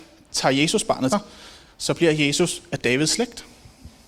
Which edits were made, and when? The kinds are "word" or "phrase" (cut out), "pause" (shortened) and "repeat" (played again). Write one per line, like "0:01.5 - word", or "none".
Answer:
0:01.1 - word